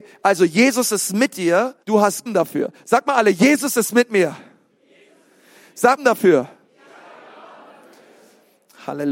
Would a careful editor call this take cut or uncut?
cut